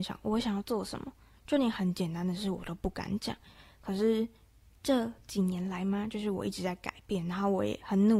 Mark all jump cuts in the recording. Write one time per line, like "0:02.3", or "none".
none